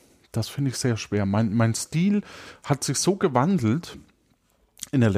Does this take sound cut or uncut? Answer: uncut